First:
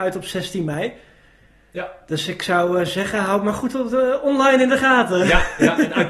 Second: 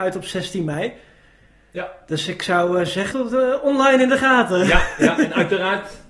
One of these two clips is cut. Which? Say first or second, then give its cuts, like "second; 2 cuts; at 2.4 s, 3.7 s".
second; 1 cut; at 3.1 s